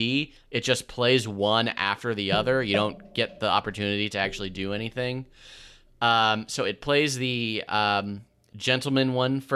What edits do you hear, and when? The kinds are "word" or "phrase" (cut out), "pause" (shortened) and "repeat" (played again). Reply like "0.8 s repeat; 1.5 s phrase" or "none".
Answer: none